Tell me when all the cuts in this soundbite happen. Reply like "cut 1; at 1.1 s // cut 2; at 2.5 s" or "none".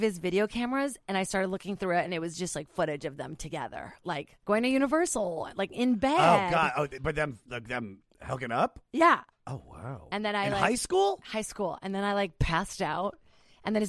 cut 1; at 4.4 s